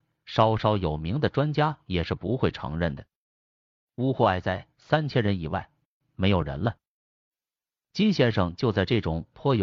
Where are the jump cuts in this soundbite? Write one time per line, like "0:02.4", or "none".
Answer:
0:04.7